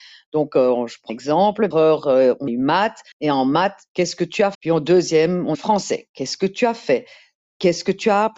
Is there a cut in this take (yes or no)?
yes